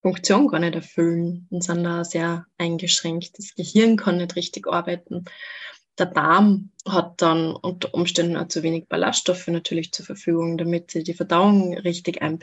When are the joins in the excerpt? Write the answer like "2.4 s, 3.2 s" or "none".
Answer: 6.8 s